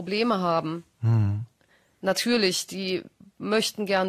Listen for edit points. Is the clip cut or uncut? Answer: uncut